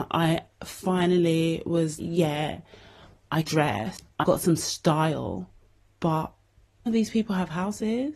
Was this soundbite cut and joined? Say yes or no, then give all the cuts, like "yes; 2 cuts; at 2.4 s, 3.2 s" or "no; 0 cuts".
yes; 4 cuts; at 2.0 s, 3.4 s, 4.2 s, 6.9 s